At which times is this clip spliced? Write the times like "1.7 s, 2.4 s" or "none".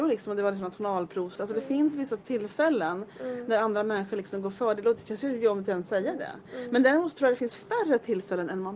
none